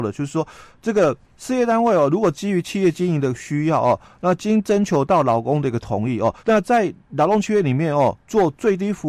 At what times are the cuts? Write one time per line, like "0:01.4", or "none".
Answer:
0:01.3
0:06.4